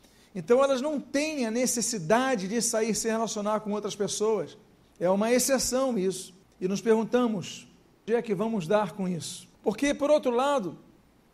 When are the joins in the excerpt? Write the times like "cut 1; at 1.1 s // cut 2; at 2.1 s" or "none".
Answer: cut 1; at 4.8 s // cut 2; at 6.4 s // cut 3; at 8.1 s // cut 4; at 9.5 s